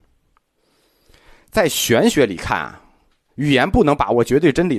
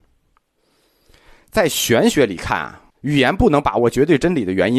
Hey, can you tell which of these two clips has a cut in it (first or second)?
second